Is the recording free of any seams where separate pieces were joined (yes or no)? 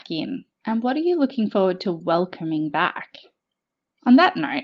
yes